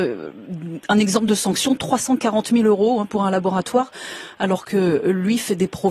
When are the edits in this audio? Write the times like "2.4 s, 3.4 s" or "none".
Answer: none